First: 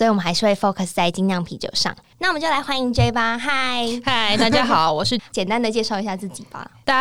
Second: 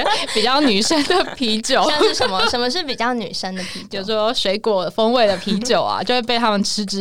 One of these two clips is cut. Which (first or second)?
first